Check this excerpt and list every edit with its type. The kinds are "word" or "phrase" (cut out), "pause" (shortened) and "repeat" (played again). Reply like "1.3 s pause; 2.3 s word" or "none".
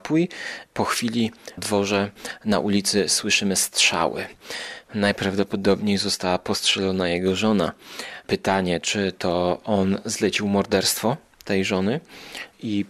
1.6 s word